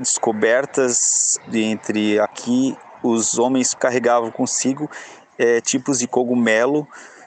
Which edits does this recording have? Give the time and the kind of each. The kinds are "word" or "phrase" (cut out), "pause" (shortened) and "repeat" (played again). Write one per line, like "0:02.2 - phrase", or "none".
0:01.4 - word
0:02.3 - phrase
0:03.8 - word

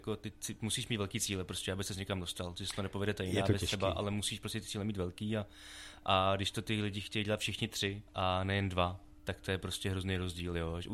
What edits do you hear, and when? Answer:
0:08.1 - pause

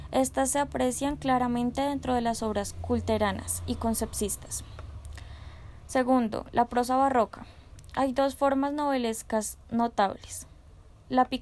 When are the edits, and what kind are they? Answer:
none

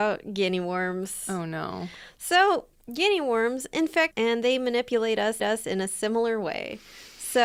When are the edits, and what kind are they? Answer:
0:04.1 - word
0:05.4 - repeat

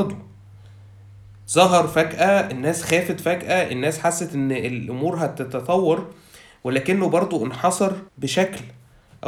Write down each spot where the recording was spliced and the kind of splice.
0:08.1 - pause

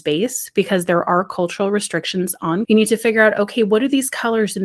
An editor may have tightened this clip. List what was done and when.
0:02.6 - word

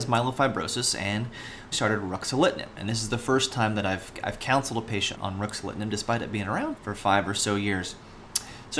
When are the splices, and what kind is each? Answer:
0:01.7 - word
0:05.1 - word
0:06.8 - word

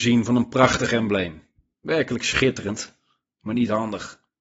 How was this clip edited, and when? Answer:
none

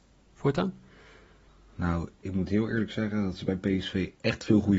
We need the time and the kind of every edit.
none

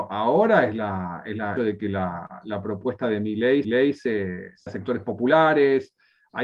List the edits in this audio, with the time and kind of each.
0:01.6 - phrase
0:03.6 - repeat
0:04.7 - word

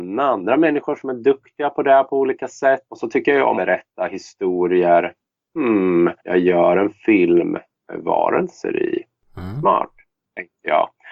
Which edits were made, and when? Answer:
0:02.8 - pause
0:03.6 - phrase
0:06.2 - pause

